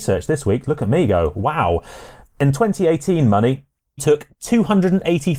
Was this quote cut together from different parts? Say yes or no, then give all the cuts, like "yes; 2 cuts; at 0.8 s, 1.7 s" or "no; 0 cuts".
yes; 1 cut; at 4.0 s